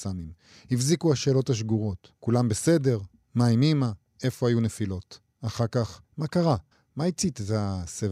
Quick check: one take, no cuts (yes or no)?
no